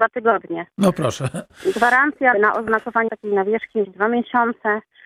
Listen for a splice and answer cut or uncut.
cut